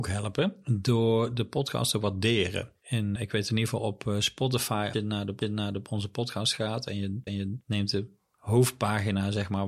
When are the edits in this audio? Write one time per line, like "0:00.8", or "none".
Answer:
0:03.2
0:04.9
0:05.4
0:07.3